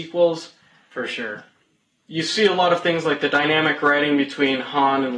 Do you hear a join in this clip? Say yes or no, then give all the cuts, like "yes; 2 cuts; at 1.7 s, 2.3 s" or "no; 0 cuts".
no; 0 cuts